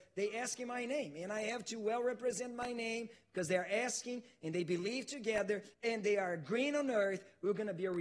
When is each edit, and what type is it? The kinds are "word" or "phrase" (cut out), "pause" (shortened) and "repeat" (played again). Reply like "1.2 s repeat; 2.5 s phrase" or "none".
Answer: 5.7 s pause